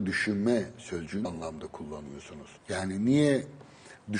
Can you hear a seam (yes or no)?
yes